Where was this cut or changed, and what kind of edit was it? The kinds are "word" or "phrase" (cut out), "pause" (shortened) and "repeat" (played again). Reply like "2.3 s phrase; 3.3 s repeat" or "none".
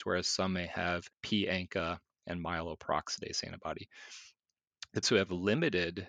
1.1 s pause; 5.0 s word

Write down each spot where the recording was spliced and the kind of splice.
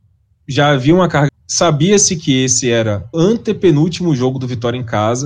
1.3 s word; 3.1 s word

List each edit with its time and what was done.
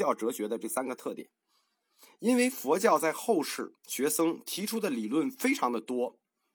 3.8 s pause

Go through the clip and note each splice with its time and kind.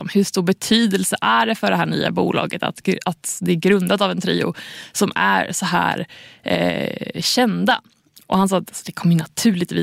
none

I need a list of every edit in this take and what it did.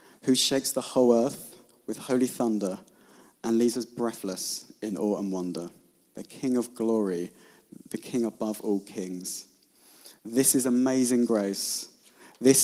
none

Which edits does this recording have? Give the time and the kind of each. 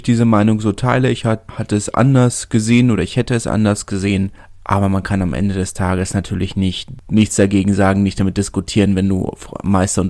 none

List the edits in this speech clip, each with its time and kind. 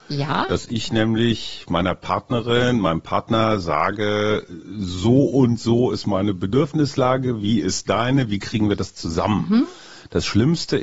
none

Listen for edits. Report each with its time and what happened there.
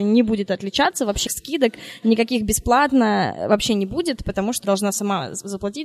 1.3 s word; 4.6 s word

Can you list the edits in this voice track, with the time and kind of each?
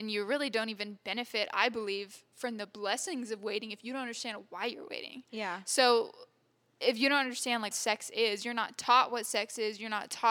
7.7 s word

